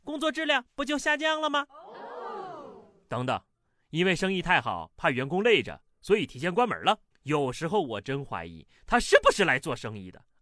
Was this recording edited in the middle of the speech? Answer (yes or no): yes